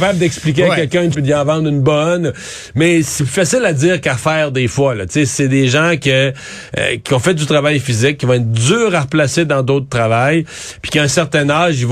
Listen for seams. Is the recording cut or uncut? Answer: cut